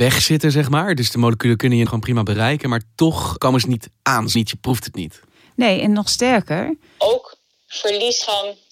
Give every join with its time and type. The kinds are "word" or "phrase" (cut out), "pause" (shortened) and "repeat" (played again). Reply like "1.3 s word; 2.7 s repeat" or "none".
1.9 s word; 3.4 s word; 4.4 s word